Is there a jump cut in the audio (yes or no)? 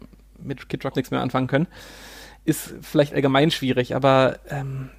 yes